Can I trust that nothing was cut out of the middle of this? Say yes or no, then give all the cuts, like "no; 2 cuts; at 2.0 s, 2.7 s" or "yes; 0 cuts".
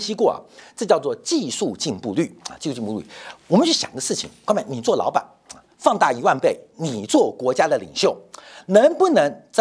yes; 0 cuts